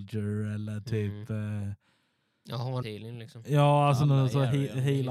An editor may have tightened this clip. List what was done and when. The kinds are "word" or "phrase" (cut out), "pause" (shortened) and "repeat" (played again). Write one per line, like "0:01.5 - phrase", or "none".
0:02.8 - word

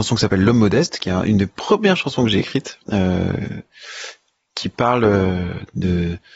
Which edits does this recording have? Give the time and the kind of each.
0:02.8 - pause

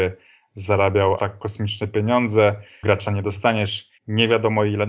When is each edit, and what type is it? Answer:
0:01.2 - word
0:02.8 - phrase
0:04.0 - pause

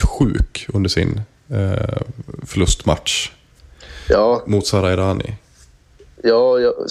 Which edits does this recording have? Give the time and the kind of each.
none

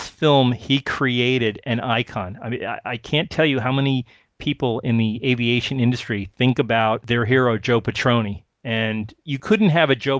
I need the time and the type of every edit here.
none

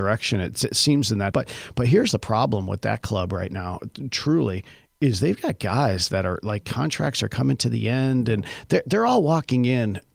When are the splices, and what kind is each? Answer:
0:01.3 - word

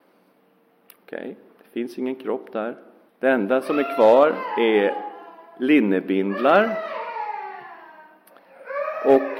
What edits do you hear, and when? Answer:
0:03.1 - pause

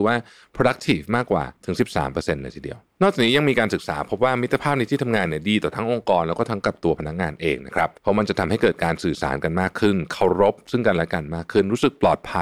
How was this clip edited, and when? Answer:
0:01.6 - pause
0:08.0 - pause

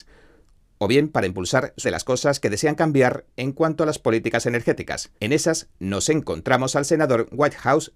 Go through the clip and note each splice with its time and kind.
0:01.8 - word
0:05.2 - pause

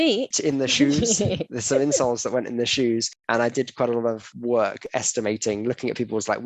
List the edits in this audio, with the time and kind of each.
none

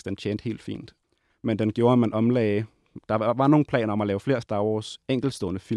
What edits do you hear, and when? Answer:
none

